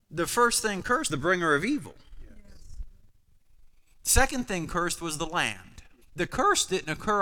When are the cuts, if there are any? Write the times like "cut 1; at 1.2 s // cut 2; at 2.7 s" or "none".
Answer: cut 1; at 1.1 s // cut 2; at 6.0 s